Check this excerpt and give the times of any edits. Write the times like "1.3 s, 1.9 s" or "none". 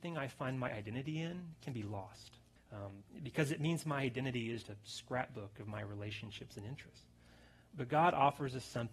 2.6 s, 4.6 s